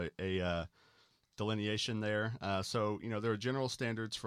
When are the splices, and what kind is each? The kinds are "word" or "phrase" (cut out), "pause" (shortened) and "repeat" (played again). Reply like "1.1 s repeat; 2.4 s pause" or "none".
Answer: none